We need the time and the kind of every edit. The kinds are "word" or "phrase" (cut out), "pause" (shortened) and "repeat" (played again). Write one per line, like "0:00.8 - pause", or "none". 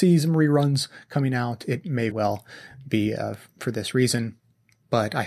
0:02.1 - word